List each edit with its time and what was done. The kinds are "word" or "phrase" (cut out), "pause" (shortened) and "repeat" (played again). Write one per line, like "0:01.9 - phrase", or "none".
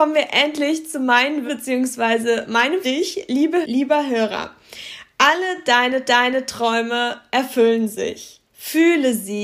0:01.5 - word
0:02.8 - phrase
0:03.6 - word
0:06.0 - repeat
0:08.5 - pause